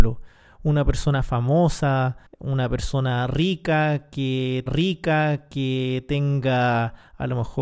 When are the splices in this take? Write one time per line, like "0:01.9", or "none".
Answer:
0:02.3
0:04.7